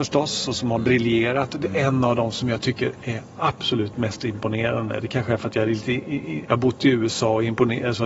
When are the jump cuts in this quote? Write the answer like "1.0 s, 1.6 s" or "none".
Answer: none